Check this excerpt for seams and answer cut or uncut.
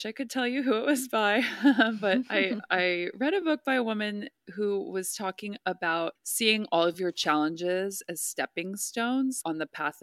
uncut